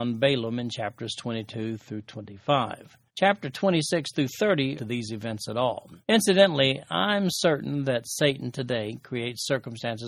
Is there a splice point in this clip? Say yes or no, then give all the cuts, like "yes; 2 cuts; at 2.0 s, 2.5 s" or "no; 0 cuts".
yes; 3 cuts; at 3.1 s, 4.8 s, 6.0 s